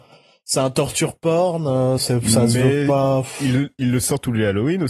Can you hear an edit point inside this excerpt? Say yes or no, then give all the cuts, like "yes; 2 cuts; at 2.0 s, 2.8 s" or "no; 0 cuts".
no; 0 cuts